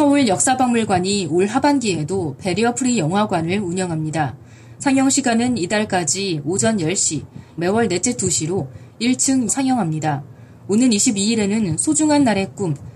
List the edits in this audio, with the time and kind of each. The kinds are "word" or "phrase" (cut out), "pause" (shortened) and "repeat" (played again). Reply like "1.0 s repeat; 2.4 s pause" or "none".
7.6 s word; 8.2 s phrase; 9.5 s phrase

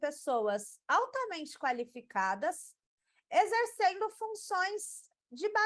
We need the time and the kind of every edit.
none

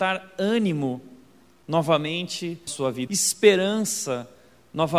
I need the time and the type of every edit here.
2.7 s word; 3.1 s word

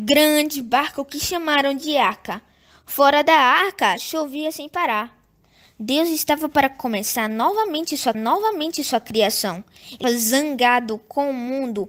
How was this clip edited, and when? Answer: 8.1 s repeat; 10.0 s word

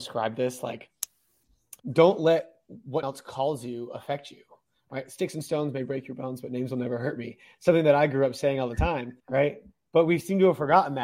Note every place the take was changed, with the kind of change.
1.8 s pause; 3.0 s word; 9.2 s pause

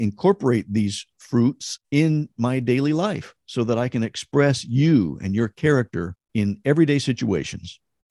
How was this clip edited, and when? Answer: 1.8 s pause; 6.2 s pause

